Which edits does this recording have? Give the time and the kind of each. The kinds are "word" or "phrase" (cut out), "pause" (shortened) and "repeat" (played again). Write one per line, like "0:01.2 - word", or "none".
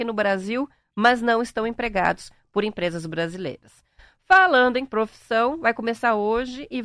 none